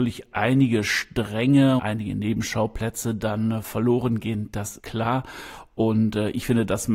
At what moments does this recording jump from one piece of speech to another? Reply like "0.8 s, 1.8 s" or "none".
1.8 s, 4.8 s